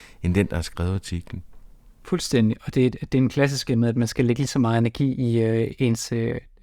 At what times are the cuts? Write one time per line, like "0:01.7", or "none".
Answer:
none